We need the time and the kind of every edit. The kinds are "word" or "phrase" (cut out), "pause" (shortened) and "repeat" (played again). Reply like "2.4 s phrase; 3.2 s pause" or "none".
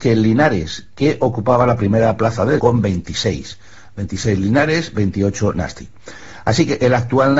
2.6 s word